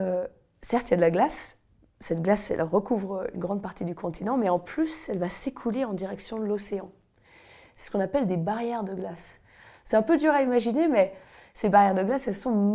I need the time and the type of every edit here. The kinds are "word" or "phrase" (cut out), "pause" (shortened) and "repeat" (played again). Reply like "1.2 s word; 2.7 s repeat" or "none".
none